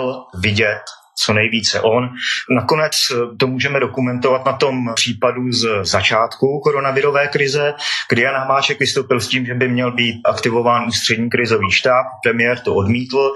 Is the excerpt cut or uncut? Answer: uncut